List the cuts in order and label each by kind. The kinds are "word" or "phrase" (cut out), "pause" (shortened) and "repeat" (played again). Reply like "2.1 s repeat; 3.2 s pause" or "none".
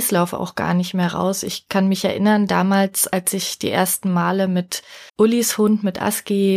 5.1 s pause